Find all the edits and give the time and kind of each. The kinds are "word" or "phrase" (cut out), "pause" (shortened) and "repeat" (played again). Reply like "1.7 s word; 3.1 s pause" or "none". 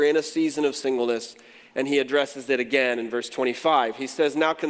none